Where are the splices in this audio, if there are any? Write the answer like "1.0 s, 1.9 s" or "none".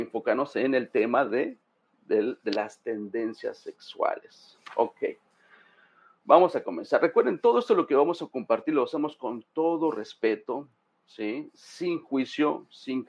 none